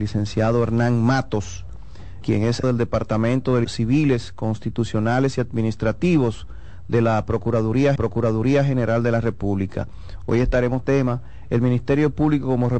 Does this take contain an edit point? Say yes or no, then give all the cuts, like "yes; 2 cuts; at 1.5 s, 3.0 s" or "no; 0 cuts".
yes; 5 cuts; at 2.2 s, 2.6 s, 3.6 s, 8.0 s, 10.8 s